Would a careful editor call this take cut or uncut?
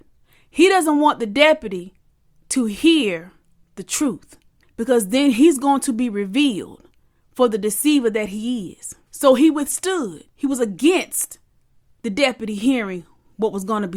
uncut